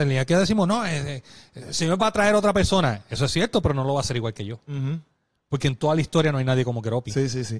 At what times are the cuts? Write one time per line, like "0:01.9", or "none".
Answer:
none